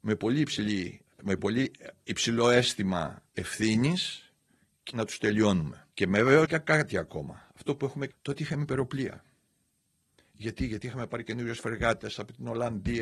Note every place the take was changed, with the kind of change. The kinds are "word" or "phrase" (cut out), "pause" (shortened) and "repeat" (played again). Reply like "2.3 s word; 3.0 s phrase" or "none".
1.1 s pause; 3.3 s pause; 4.9 s word; 5.9 s pause; 6.4 s word; 8.1 s word

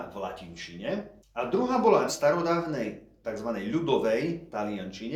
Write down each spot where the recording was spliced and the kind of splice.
1.2 s pause; 2.1 s word; 3.2 s phrase

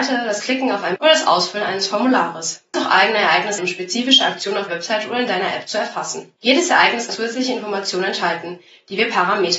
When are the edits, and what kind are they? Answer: 1.0 s word; 2.7 s word; 3.6 s word; 4.7 s word; 7.1 s word

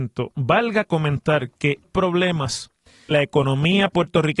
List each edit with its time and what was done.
1.8 s phrase; 3.1 s word

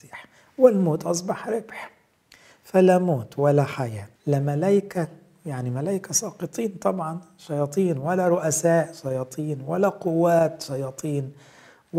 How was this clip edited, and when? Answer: 4.2 s pause

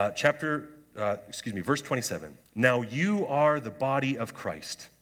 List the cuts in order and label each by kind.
2.5 s pause

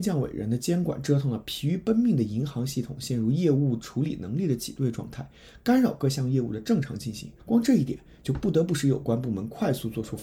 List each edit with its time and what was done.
7.4 s pause

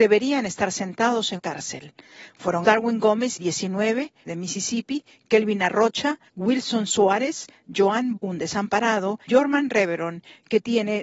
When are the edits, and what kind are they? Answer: 1.4 s word; 2.6 s word; 3.4 s phrase; 4.3 s word; 6.3 s pause; 8.2 s word; 9.3 s word

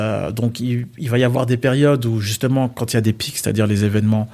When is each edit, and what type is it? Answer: none

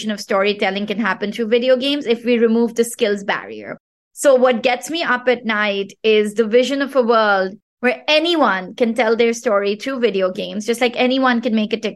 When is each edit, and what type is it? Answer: none

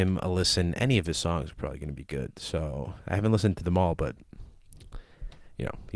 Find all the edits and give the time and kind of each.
none

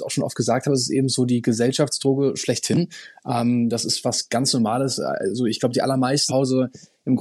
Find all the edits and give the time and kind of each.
6.3 s phrase

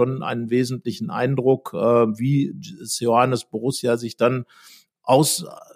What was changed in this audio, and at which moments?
none

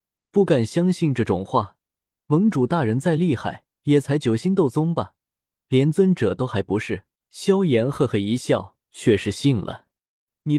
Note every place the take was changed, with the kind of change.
3.7 s pause; 7.2 s pause; 8.8 s pause

